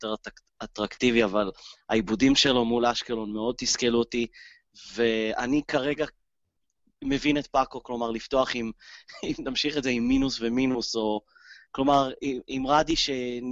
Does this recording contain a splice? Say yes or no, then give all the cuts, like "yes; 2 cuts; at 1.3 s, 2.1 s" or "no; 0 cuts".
no; 0 cuts